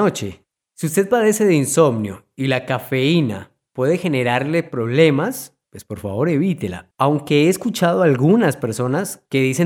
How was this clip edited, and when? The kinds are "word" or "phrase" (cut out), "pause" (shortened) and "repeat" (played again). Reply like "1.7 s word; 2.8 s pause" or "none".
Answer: 6.9 s pause